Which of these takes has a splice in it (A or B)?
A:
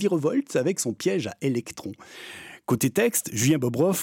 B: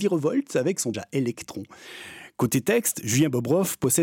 B